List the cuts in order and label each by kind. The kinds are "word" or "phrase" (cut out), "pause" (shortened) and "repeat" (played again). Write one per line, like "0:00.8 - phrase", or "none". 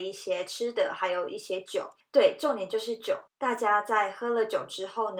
0:02.0 - pause
0:03.3 - pause